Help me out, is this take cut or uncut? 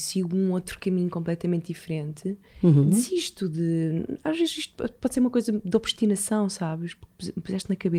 uncut